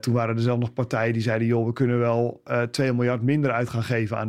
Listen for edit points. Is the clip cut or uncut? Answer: uncut